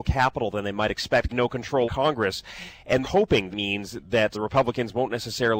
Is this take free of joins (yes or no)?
no